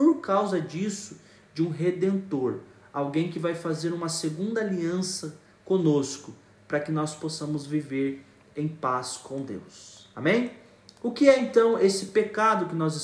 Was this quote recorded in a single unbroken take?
yes; 0 cuts

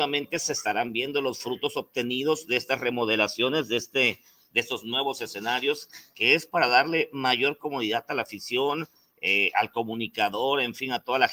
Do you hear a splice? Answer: no; 0 cuts

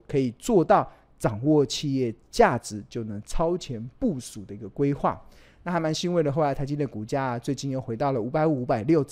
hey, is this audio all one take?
yes; 0 cuts

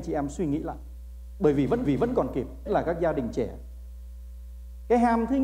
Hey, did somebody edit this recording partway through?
yes; 2 cuts; at 1.8 s, 2.7 s

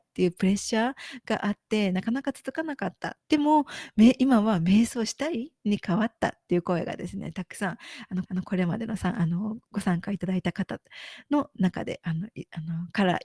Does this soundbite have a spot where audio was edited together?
yes; 2 cuts; at 3.2 s, 8.3 s

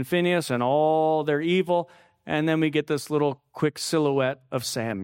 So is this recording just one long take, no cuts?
yes; 0 cuts

